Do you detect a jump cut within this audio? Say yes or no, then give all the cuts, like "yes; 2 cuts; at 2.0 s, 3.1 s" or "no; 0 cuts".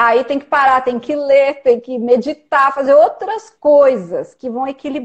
no; 0 cuts